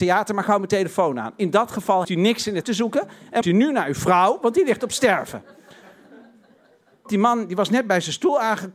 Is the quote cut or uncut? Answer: cut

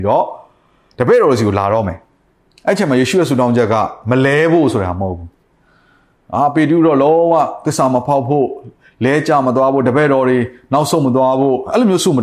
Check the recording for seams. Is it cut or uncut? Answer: uncut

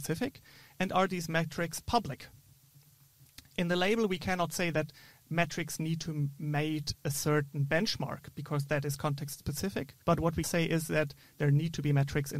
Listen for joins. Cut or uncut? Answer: cut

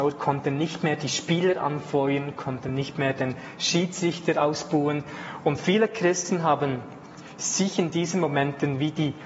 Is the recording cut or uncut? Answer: uncut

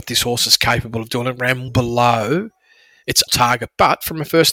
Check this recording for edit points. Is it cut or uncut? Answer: cut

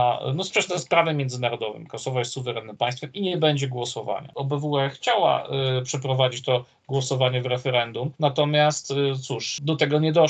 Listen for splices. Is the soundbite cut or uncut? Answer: cut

